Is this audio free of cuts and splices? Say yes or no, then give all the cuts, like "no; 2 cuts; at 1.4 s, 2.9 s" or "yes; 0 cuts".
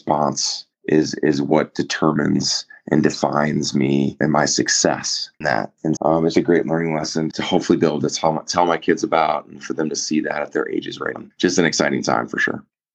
no; 6 cuts; at 4.2 s, 5.4 s, 6.0 s, 6.3 s, 7.3 s, 11.1 s